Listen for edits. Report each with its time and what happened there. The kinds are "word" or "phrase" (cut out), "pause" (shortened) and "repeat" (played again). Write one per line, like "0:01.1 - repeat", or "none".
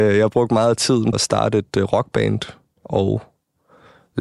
0:01.1 - word